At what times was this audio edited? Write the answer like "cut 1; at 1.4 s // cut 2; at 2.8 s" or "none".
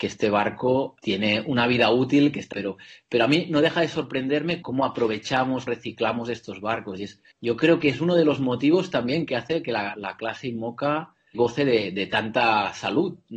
cut 1; at 1.0 s // cut 2; at 2.5 s // cut 3; at 4.6 s // cut 4; at 5.7 s // cut 5; at 7.3 s // cut 6; at 9.9 s // cut 7; at 11.3 s